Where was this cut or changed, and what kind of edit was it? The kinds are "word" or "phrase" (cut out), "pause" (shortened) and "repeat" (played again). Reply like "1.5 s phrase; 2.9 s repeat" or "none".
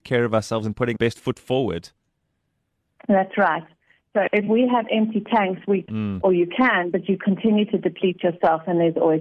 1.0 s word; 5.9 s phrase